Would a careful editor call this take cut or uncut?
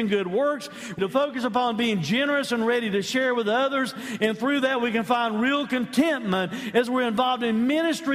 cut